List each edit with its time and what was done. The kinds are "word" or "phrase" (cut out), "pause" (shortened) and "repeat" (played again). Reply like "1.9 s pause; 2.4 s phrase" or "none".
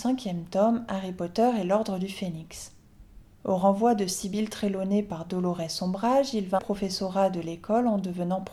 3.2 s pause; 6.6 s phrase

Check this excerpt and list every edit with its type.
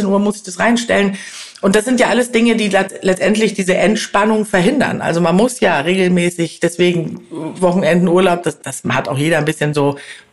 none

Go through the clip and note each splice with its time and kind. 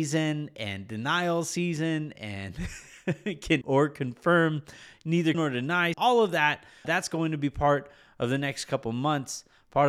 3.6 s word; 5.3 s word; 5.9 s word; 6.8 s word

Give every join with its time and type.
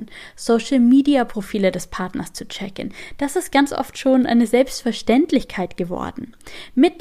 none

